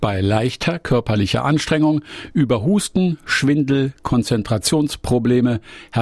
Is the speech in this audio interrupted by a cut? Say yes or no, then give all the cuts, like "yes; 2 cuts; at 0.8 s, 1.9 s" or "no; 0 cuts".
no; 0 cuts